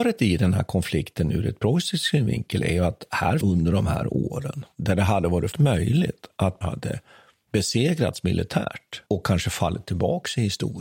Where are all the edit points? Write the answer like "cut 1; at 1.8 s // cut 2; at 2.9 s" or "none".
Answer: cut 1; at 3.4 s // cut 2; at 5.5 s // cut 3; at 6.6 s // cut 4; at 9.1 s